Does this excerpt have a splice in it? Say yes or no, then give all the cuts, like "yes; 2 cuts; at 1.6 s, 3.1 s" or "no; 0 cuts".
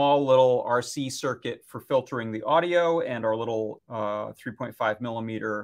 yes; 1 cut; at 3.8 s